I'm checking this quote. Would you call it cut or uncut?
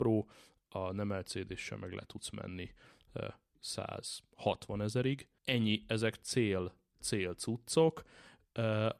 cut